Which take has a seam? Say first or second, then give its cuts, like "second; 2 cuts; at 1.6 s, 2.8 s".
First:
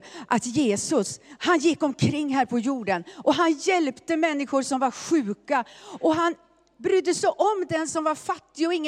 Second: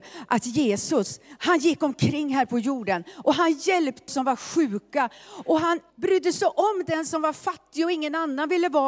second; 2 cuts; at 4.1 s, 5.9 s